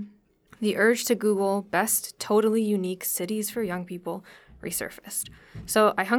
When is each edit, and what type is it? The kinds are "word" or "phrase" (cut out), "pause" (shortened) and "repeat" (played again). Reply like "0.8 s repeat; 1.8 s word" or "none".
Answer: none